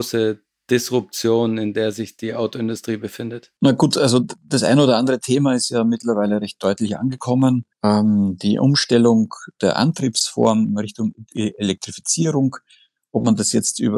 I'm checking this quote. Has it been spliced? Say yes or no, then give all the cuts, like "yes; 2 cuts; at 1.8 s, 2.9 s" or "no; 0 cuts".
yes; 2 cuts; at 3.6 s, 7.7 s